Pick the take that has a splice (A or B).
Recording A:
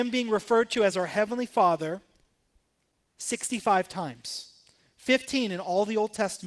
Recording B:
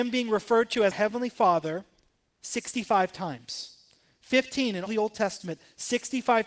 B